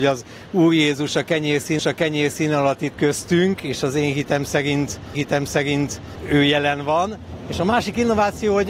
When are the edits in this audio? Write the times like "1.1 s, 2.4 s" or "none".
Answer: 1.8 s, 2.9 s, 5.1 s